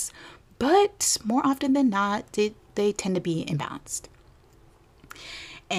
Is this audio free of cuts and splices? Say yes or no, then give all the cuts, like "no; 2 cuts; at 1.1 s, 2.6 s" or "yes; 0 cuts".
yes; 0 cuts